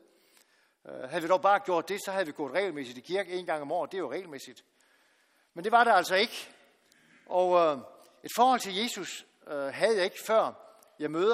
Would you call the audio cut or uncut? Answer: uncut